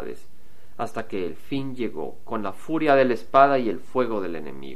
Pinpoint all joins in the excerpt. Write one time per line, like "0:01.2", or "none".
none